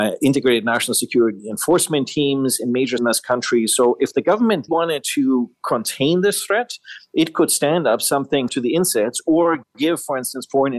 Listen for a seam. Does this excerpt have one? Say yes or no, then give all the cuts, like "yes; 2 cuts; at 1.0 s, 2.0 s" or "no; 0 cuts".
yes; 3 cuts; at 3.0 s, 4.7 s, 8.5 s